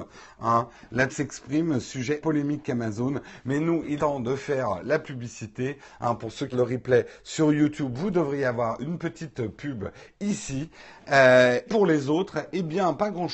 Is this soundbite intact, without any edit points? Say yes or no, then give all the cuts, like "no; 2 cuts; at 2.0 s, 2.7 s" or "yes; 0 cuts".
no; 5 cuts; at 1.1 s, 2.2 s, 4.0 s, 6.5 s, 11.7 s